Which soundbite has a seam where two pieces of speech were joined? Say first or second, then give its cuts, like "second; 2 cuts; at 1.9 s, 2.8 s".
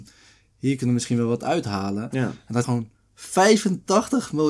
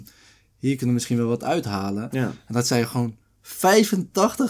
first; 1 cut; at 2.6 s